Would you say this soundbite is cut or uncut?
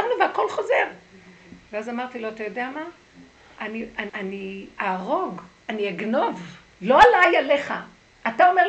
cut